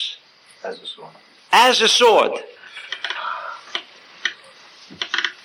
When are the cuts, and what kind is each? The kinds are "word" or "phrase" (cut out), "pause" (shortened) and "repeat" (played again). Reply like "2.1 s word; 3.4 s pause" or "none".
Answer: none

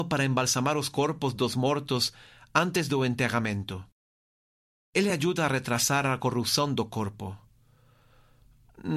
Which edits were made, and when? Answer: none

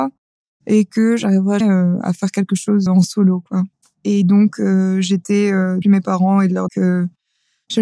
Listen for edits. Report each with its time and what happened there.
1.6 s word; 2.9 s word; 3.7 s pause; 5.8 s phrase; 6.7 s word

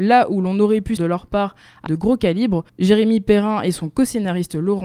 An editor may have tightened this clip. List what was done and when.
1.0 s word; 1.9 s word; 2.7 s pause

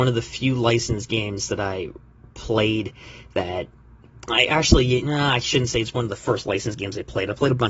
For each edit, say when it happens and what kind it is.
none

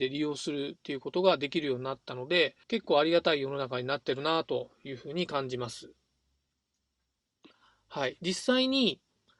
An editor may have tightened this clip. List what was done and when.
2.6 s pause

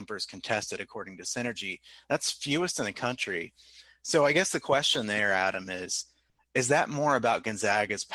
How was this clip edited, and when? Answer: none

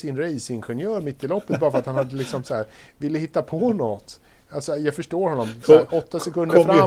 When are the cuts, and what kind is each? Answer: none

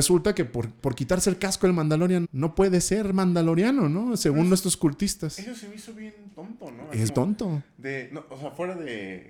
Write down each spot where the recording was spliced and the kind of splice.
2.2 s word; 7.1 s word

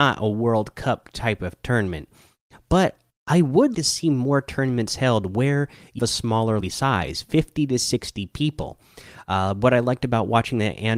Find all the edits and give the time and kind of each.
3.1 s pause; 3.7 s word; 6.0 s word; 6.6 s word

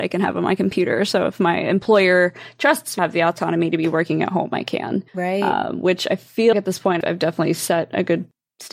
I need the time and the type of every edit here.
3.0 s phrase; 5.1 s pause; 6.5 s word; 7.0 s word

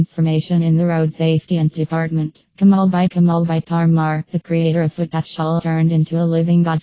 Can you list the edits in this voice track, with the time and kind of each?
1.7 s word; 2.5 s pause; 3.1 s word; 5.6 s word

